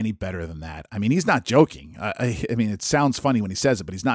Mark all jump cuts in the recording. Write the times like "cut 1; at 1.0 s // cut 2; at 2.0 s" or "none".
none

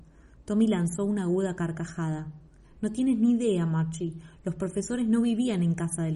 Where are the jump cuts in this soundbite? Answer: none

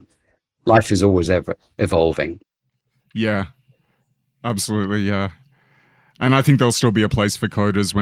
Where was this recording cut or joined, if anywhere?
none

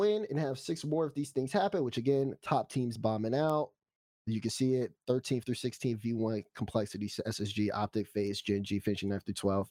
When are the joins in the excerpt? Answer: none

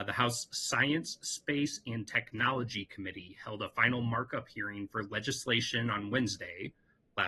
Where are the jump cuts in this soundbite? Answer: none

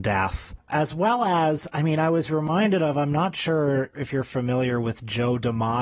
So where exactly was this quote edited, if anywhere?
none

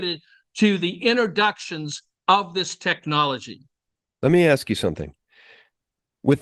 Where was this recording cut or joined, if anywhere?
none

